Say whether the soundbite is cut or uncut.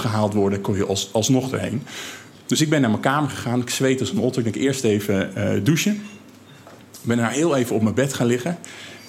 uncut